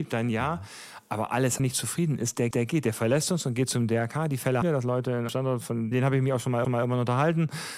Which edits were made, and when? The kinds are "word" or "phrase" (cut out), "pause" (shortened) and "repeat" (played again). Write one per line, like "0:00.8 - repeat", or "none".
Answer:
0:01.6 - phrase
0:02.5 - repeat
0:04.6 - word
0:05.3 - word
0:05.9 - word
0:06.6 - repeat